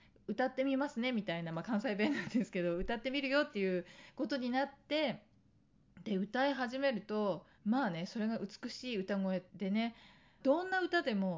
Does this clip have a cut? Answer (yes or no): yes